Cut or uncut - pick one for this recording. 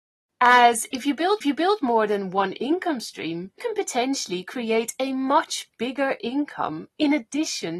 cut